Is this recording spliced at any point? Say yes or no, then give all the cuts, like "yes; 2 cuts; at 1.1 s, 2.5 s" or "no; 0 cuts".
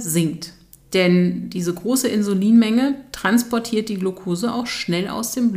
no; 0 cuts